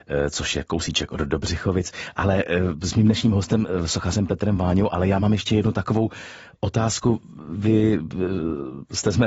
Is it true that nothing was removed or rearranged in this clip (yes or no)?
yes